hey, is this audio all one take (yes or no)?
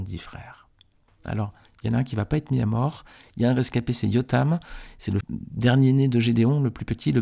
no